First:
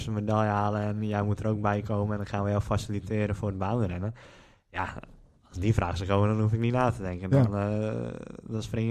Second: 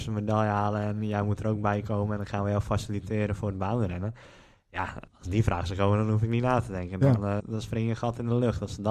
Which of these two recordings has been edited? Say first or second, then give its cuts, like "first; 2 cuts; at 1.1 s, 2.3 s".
second; 2 cuts; at 5.1 s, 7.4 s